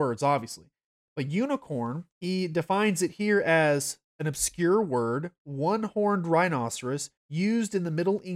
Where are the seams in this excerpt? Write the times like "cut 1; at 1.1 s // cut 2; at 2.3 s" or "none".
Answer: cut 1; at 2.1 s // cut 2; at 4.1 s // cut 3; at 7.2 s